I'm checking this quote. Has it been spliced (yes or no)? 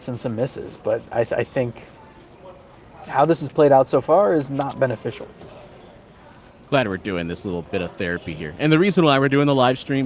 no